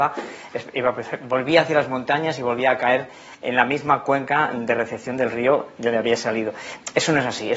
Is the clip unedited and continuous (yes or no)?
yes